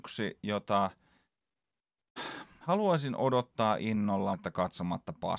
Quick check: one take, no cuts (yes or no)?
no